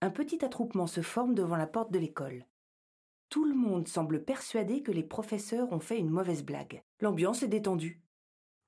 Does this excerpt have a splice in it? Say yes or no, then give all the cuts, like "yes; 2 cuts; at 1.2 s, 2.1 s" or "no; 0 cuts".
yes; 1 cut; at 6.9 s